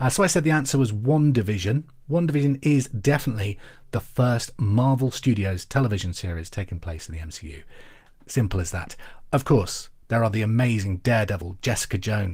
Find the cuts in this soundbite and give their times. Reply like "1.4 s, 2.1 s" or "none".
none